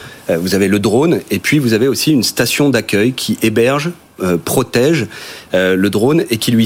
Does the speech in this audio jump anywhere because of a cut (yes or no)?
no